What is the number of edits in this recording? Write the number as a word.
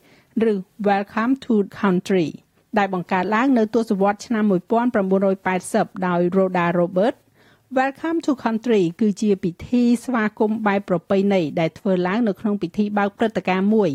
one